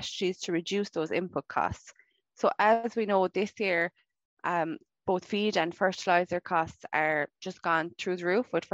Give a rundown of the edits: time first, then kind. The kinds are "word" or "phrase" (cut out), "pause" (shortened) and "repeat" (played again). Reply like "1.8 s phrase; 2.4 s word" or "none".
none